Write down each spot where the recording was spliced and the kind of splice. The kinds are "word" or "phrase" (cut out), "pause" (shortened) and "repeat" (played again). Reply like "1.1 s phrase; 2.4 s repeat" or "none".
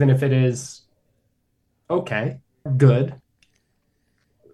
2.7 s word